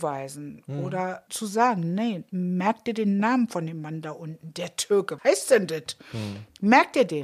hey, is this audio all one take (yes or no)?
no